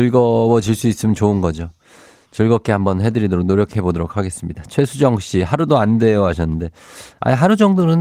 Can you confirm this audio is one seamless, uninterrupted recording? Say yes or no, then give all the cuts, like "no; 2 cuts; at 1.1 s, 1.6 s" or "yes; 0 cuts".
yes; 0 cuts